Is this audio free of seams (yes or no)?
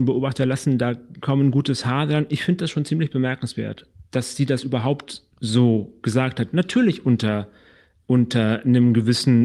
yes